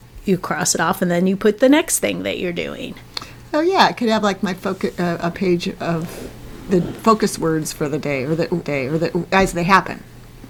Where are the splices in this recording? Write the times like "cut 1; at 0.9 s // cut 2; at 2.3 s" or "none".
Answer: cut 1; at 6.7 s // cut 2; at 8.6 s